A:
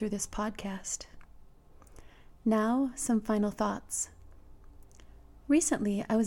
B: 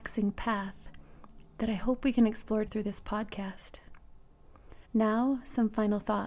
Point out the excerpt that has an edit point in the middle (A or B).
B